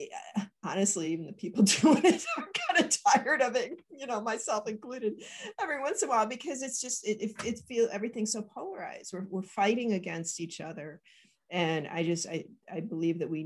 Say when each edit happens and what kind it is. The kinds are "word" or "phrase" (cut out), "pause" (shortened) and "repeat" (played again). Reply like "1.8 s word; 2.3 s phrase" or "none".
none